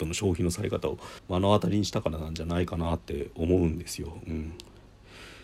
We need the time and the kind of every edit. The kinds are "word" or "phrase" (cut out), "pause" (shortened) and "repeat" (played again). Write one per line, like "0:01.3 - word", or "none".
0:01.2 - pause

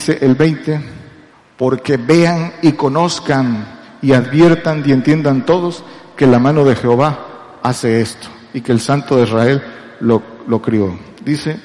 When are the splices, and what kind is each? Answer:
0:01.3 - pause

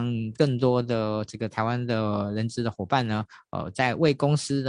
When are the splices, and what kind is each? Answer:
none

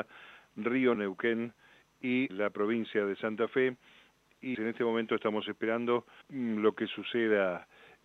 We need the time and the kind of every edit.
0:01.0 - word
0:02.3 - word
0:04.5 - word
0:06.2 - word

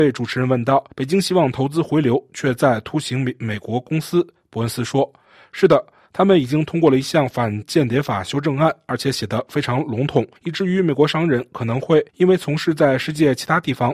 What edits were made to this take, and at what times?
0:00.9 - pause
0:06.1 - pause
0:10.4 - pause
0:12.1 - pause

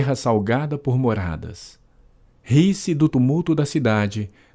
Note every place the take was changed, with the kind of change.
none

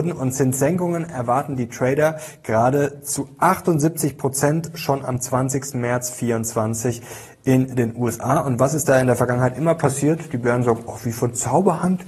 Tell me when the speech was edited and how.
none

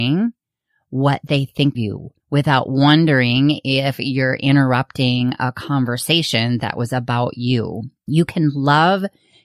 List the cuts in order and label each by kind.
0:01.7 - word
0:02.2 - pause

